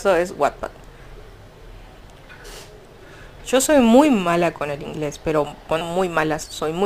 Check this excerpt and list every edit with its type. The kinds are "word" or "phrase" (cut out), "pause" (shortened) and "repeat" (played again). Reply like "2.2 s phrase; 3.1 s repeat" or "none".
5.8 s word